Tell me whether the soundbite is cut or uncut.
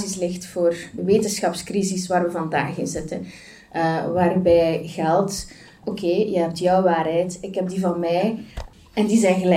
cut